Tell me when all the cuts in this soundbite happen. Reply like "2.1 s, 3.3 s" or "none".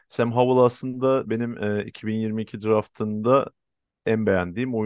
none